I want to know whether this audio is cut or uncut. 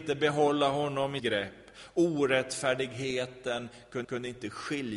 cut